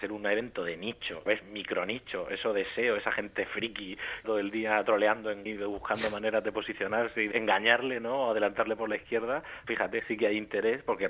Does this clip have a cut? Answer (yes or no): yes